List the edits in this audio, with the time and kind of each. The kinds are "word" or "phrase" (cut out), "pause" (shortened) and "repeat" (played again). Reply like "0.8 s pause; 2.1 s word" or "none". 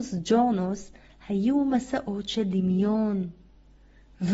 none